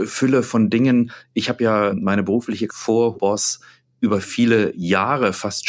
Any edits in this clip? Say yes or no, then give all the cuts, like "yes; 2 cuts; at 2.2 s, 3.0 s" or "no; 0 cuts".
yes; 3 cuts; at 1.9 s, 2.7 s, 3.1 s